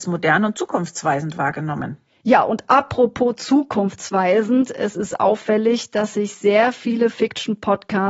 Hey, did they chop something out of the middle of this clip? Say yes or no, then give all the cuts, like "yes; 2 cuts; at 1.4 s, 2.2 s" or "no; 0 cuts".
no; 0 cuts